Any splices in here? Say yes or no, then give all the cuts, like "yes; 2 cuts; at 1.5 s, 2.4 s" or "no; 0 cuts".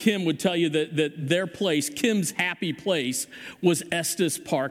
no; 0 cuts